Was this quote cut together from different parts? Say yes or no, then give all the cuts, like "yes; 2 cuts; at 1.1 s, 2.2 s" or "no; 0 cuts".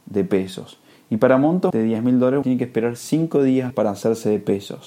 yes; 3 cuts; at 1.7 s, 2.4 s, 3.7 s